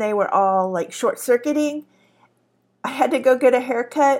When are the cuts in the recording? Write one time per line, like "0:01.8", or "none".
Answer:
none

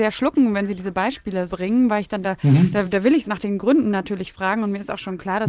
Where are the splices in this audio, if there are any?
0:01.5
0:02.2
0:02.8
0:03.2

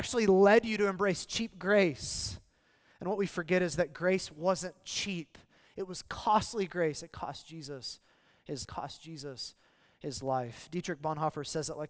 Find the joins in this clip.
0:08.6

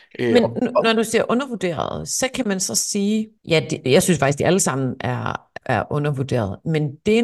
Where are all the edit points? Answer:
0:03.4
0:05.6

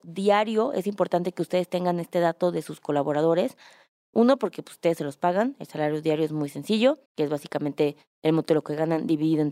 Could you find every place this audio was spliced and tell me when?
0:07.1

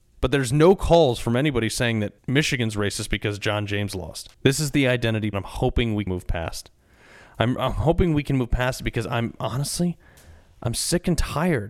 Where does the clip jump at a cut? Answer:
0:02.2
0:04.3
0:05.3
0:06.1
0:07.6

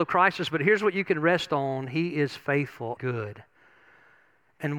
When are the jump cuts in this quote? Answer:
0:03.0

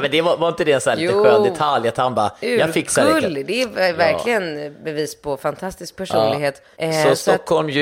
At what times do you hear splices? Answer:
0:06.7

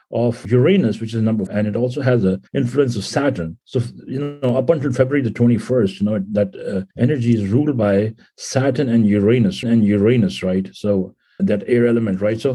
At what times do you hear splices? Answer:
0:01.5
0:02.5
0:03.6
0:06.9
0:09.6
0:11.4

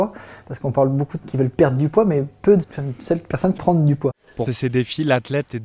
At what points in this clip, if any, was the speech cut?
0:01.2
0:02.6
0:03.6
0:04.5

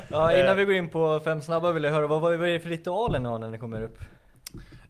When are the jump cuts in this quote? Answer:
none

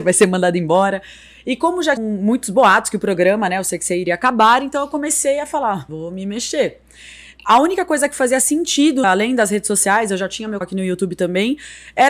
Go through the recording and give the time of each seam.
0:02.0
0:05.9
0:09.0
0:10.6

